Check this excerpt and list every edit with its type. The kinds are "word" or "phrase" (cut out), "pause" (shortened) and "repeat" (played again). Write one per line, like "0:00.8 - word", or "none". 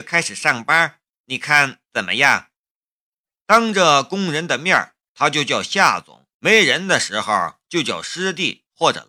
0:02.6 - pause
0:06.3 - pause